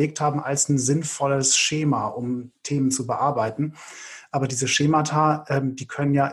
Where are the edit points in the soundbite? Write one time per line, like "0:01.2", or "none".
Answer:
none